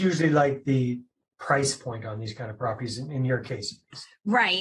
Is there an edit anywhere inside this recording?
no; 0 cuts

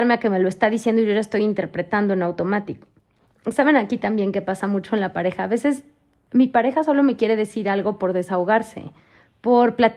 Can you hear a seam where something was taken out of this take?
no; 0 cuts

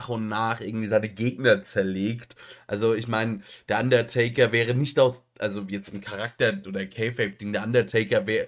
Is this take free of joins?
yes; 0 cuts

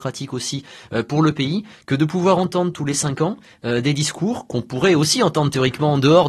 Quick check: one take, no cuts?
yes; 0 cuts

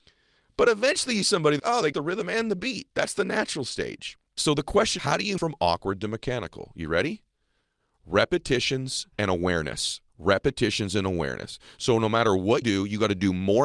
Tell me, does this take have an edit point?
yes; 9 cuts; at 1.2 s, 1.6 s, 1.9 s, 2.9 s, 5.0 s, 5.4 s, 9.1 s, 10.1 s, 12.6 s

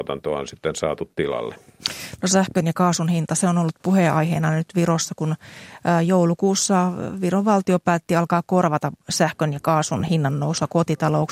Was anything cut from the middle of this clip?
no; 0 cuts

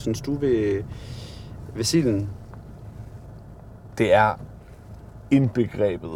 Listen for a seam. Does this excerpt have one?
no; 0 cuts

